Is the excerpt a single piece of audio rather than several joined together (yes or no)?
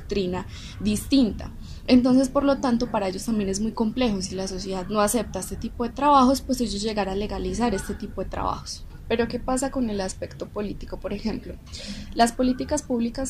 yes